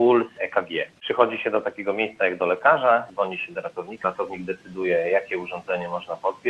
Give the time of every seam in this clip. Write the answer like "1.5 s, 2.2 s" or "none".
4.0 s